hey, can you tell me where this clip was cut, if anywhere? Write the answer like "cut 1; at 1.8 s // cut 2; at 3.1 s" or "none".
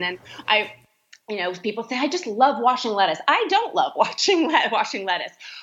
none